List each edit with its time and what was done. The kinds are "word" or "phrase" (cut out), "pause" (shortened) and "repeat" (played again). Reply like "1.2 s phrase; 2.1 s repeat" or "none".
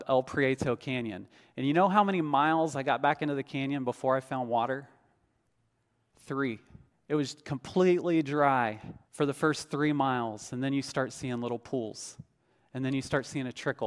6.9 s pause; 9.0 s pause